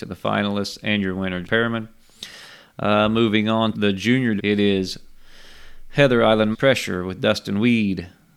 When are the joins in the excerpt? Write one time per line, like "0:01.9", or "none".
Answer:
0:01.4
0:03.7
0:04.4
0:06.5